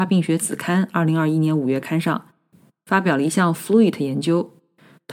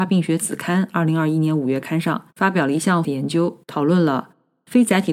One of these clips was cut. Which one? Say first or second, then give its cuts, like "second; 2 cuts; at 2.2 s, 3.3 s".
second; 3 cuts; at 2.3 s, 3.0 s, 3.6 s